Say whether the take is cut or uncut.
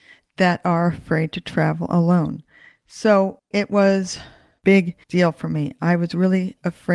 cut